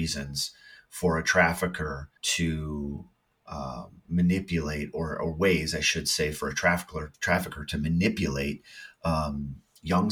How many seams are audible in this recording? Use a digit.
2